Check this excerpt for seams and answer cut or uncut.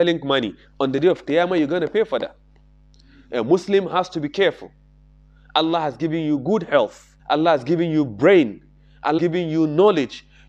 cut